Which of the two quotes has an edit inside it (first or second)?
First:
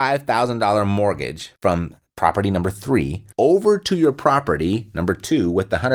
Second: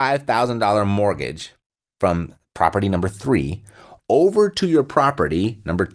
first